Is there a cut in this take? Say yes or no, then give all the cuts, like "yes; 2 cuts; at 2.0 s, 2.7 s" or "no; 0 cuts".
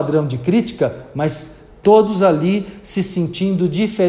no; 0 cuts